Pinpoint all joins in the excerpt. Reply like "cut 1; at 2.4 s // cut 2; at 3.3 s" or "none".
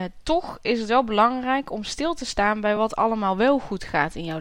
none